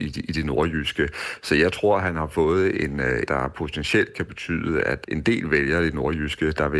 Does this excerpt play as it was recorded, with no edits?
no; 2 cuts; at 3.3 s, 5.0 s

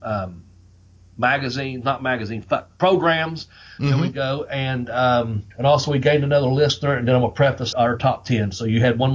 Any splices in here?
yes; 2 cuts; at 5.5 s, 7.7 s

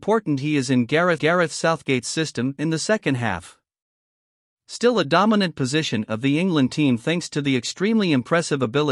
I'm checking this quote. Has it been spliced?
yes; 1 cut; at 1.2 s

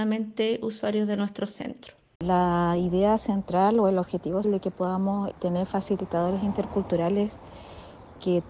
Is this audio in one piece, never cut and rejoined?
no; 2 cuts; at 4.4 s, 5.3 s

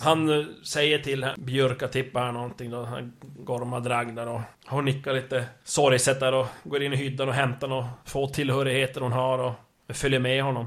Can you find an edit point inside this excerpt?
yes; 1 cut; at 4.5 s

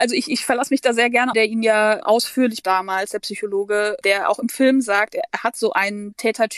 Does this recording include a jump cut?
yes; 4 cuts; at 1.3 s, 2.0 s, 2.6 s, 4.0 s

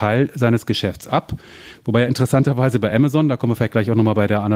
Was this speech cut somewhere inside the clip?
no; 0 cuts

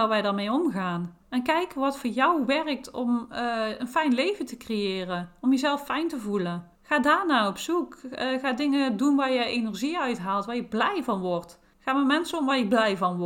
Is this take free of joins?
no; 3 cuts; at 1.2 s, 6.7 s, 11.7 s

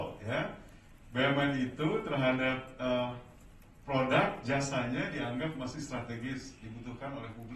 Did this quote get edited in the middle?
no; 0 cuts

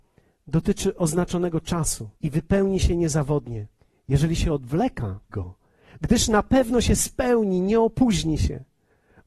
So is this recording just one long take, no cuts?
no; 3 cuts; at 2.2 s, 3.8 s, 5.3 s

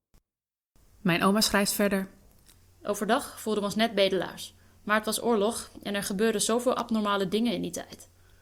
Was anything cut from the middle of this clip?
no; 0 cuts

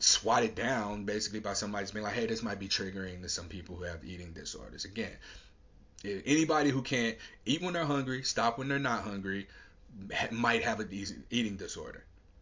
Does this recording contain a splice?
no; 0 cuts

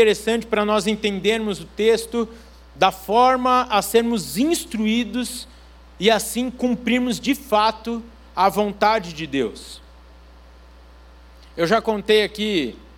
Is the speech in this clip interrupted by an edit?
no; 0 cuts

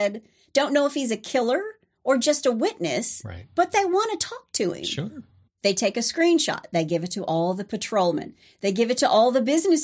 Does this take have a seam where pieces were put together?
no; 0 cuts

